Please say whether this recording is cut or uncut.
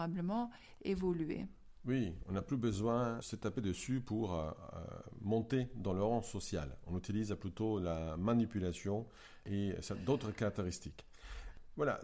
cut